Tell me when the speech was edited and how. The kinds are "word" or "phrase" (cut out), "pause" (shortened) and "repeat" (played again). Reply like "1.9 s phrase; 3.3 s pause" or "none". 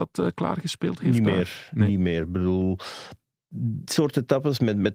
3.9 s word